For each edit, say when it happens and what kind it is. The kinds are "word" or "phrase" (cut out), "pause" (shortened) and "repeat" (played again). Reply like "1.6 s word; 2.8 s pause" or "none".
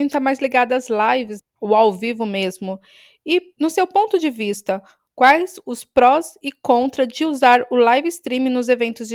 1.4 s word